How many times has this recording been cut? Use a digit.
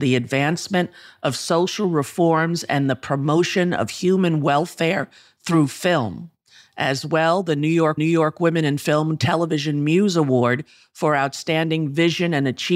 1